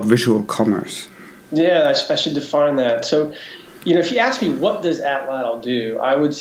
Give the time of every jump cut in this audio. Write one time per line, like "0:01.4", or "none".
none